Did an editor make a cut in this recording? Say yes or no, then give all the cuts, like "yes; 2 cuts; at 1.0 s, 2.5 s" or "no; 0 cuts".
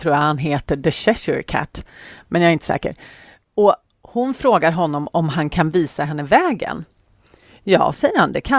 no; 0 cuts